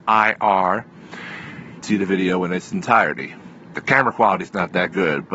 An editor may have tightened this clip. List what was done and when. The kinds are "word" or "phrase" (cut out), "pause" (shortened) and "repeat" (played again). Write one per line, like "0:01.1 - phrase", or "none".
0:01.8 - phrase